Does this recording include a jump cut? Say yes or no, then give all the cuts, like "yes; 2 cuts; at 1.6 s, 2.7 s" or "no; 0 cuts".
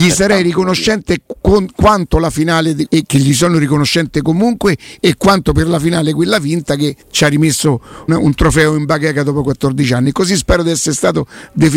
yes; 3 cuts; at 2.9 s, 7.0 s, 8.1 s